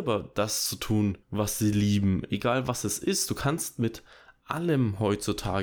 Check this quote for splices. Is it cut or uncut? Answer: cut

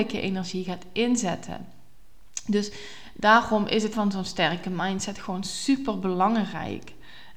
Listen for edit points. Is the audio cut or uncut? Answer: cut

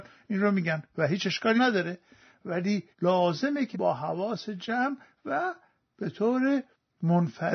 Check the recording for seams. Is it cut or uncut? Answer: cut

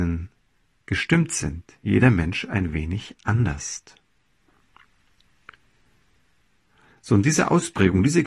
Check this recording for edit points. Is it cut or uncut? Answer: uncut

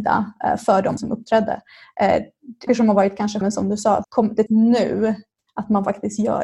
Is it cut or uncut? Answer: cut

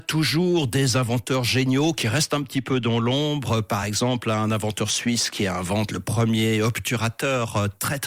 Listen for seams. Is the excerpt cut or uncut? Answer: uncut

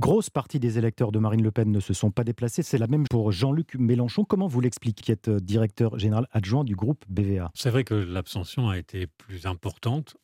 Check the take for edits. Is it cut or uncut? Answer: cut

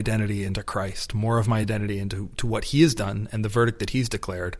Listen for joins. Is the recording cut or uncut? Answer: uncut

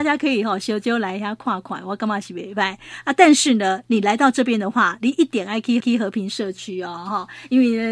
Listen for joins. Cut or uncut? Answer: cut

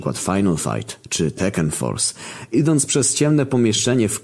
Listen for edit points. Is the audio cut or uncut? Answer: uncut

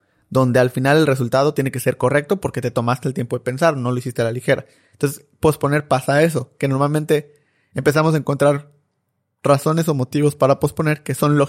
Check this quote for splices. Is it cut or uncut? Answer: uncut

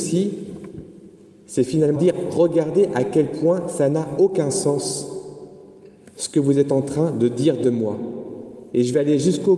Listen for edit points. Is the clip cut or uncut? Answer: cut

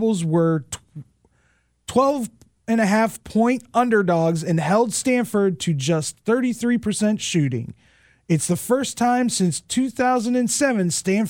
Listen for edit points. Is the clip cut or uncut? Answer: uncut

